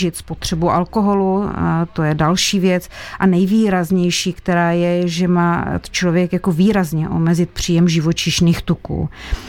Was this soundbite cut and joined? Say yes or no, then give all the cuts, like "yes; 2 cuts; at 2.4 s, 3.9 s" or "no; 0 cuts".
no; 0 cuts